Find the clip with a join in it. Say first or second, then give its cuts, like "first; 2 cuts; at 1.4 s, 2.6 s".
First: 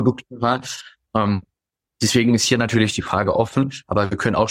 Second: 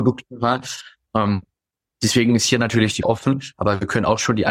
second; 1 cut; at 3.0 s